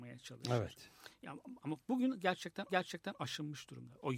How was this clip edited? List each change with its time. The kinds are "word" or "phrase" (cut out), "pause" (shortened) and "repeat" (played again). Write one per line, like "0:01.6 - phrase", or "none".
0:01.8 - pause
0:02.7 - repeat